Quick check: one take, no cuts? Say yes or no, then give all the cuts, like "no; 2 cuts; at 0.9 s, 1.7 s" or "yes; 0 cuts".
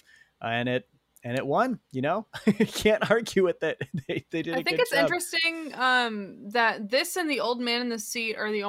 yes; 0 cuts